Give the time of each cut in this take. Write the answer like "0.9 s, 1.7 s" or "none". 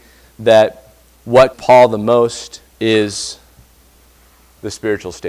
1.5 s, 2.7 s